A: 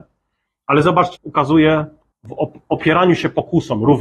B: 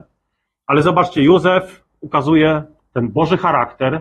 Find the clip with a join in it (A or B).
A